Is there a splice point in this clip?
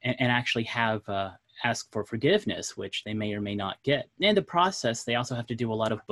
no; 0 cuts

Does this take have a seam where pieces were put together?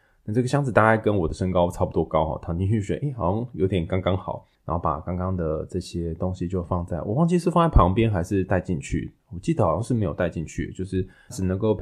yes; 1 cut; at 4.5 s

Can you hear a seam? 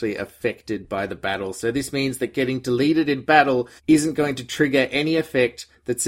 yes; 1 cut; at 3.8 s

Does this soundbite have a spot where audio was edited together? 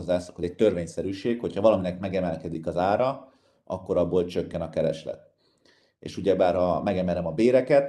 no; 0 cuts

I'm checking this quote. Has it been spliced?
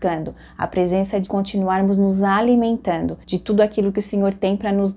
yes; 2 cuts; at 1.2 s, 3.2 s

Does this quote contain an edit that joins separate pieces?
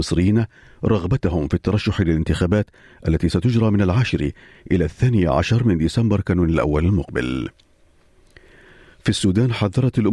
no; 0 cuts

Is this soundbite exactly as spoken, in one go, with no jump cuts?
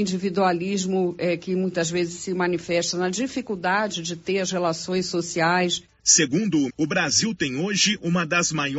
no; 1 cut; at 6.7 s

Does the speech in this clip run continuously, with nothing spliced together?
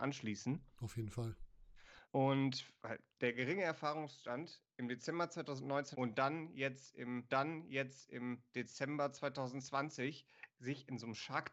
no; 3 cuts; at 2.0 s, 5.9 s, 7.3 s

